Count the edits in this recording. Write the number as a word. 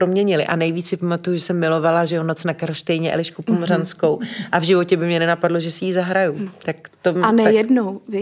zero